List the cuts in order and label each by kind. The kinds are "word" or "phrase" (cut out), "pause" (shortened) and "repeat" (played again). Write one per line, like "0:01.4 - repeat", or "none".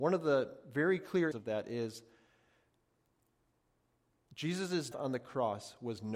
0:01.3 - word
0:04.9 - word